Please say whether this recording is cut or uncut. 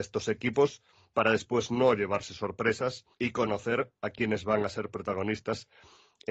cut